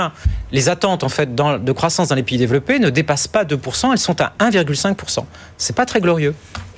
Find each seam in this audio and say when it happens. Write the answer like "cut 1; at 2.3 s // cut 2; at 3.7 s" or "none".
none